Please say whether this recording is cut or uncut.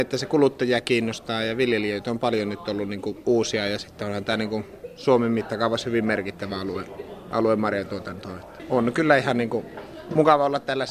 uncut